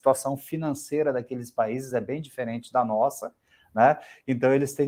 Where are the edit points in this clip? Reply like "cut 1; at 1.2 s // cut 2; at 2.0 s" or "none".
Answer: none